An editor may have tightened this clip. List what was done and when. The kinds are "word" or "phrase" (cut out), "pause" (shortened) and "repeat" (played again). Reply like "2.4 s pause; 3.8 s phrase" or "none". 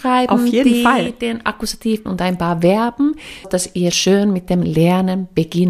2.1 s word; 3.4 s word; 3.9 s word